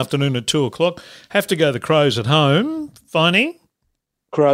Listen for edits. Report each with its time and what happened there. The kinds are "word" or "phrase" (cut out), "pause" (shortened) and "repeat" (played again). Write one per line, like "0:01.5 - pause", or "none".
none